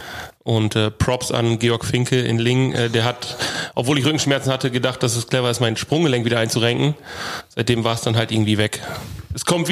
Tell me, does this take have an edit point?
no; 0 cuts

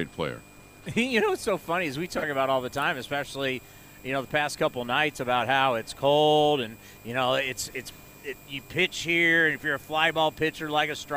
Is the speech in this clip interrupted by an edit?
yes; 1 cut; at 7.7 s

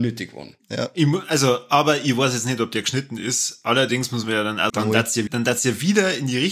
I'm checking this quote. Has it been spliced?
yes; 2 cuts; at 4.7 s, 5.3 s

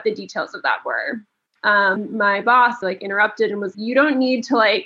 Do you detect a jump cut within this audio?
yes; 4 cuts; at 1.6 s, 2.0 s, 2.8 s, 3.7 s

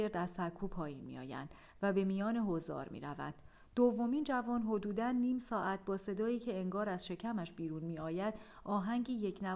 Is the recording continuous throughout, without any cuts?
yes; 0 cuts

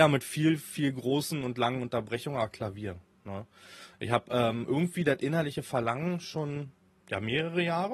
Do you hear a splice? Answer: no; 0 cuts

